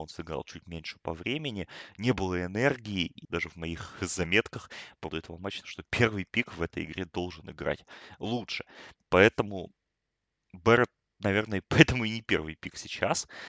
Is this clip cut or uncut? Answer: cut